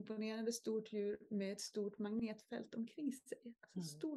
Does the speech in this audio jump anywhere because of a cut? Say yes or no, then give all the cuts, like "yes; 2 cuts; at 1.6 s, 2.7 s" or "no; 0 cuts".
no; 0 cuts